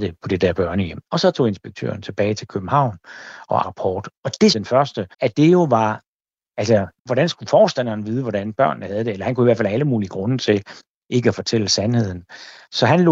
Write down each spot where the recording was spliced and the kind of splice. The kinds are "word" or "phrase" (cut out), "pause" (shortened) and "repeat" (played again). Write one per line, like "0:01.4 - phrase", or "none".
0:01.1 - pause
0:03.6 - word
0:04.2 - pause
0:04.5 - phrase
0:05.1 - pause
0:07.0 - pause